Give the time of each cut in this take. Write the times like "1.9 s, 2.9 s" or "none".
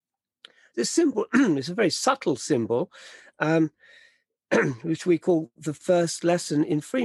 none